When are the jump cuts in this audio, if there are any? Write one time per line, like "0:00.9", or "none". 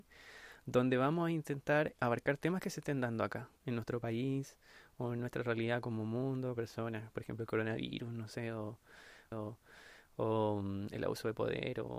0:02.0
0:03.6
0:06.6
0:09.3